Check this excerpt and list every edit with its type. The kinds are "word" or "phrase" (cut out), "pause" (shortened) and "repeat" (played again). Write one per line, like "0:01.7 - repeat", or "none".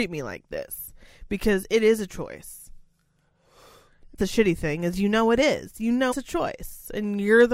0:04.2 - word
0:06.1 - word